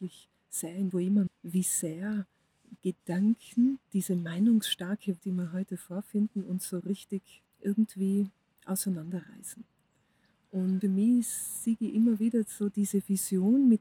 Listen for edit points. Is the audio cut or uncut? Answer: cut